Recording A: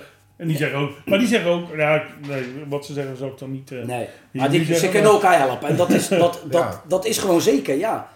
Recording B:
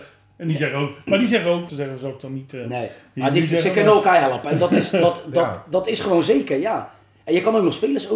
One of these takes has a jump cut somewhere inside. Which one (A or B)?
B